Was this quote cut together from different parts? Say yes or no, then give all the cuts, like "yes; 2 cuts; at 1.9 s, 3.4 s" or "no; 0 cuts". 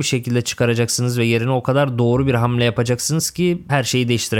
no; 0 cuts